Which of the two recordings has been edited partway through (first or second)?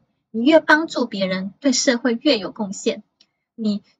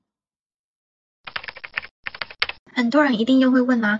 second